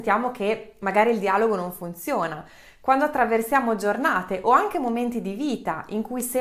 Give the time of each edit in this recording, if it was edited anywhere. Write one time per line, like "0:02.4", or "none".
none

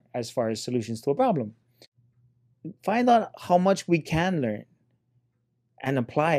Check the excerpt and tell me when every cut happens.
none

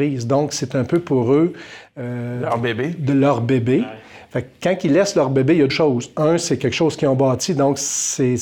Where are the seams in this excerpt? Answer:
0:05.7

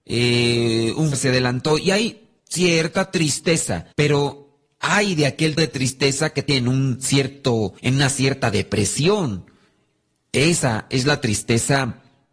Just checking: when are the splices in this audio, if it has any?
0:01.1
0:02.4
0:03.9
0:05.6
0:06.5
0:07.8

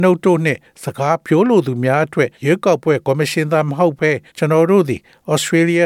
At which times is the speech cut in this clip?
0:02.3
0:04.3

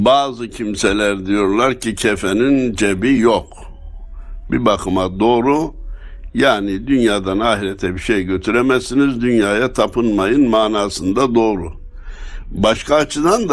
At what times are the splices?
none

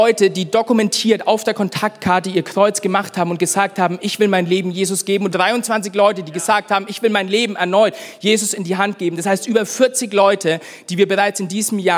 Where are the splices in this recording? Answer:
0:05.3

